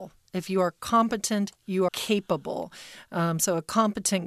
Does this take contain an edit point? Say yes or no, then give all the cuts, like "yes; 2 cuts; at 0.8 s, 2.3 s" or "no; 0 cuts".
yes; 1 cut; at 1.9 s